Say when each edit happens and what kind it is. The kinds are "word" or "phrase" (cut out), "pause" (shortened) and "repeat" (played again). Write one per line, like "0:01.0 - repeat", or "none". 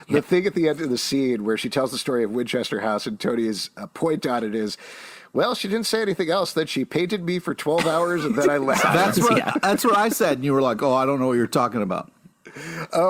none